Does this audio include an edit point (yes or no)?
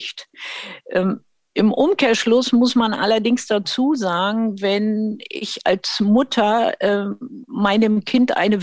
no